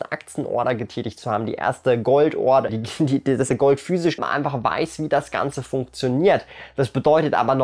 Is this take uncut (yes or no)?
no